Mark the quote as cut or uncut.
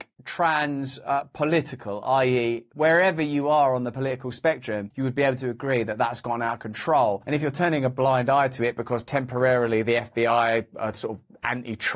uncut